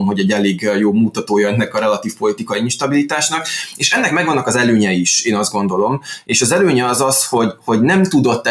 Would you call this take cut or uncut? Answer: uncut